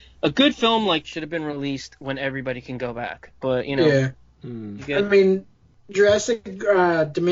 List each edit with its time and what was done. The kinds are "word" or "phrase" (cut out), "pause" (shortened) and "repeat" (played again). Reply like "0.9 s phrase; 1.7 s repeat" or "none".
1.0 s word